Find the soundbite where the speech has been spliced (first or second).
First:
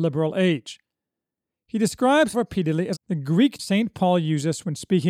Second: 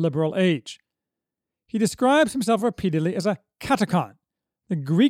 first